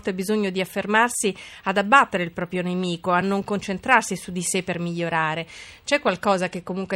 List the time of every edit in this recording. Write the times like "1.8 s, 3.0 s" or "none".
none